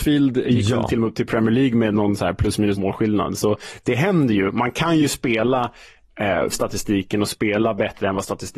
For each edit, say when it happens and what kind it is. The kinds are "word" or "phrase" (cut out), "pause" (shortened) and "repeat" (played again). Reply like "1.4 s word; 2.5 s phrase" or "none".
2.8 s word; 6.5 s word